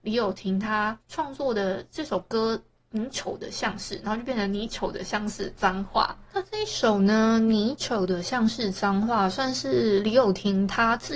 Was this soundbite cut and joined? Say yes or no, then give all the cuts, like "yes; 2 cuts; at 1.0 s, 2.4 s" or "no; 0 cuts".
yes; 1 cut; at 1.0 s